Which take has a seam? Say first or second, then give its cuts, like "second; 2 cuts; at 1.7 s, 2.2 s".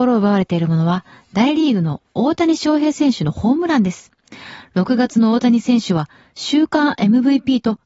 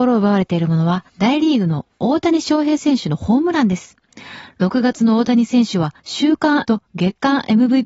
second; 3 cuts; at 1.1 s, 6.0 s, 6.6 s